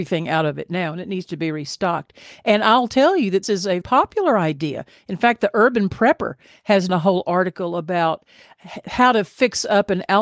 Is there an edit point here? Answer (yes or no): yes